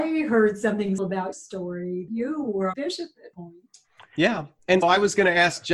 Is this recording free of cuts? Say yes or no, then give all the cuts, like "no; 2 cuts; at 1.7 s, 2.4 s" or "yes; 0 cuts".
no; 6 cuts; at 1.0 s, 1.3 s, 2.1 s, 2.7 s, 3.3 s, 4.8 s